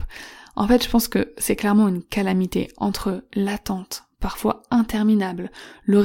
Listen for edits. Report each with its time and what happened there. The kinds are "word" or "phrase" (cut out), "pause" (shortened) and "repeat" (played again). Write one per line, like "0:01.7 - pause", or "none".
none